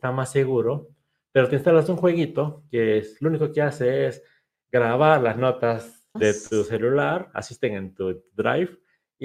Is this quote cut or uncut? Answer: cut